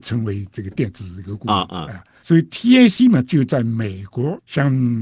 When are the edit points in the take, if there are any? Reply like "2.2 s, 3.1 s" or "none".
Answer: none